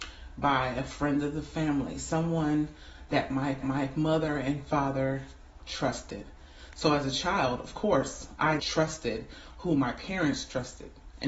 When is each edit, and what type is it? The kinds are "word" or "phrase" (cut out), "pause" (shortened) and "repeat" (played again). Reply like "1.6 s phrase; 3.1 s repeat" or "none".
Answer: 3.6 s repeat; 8.6 s word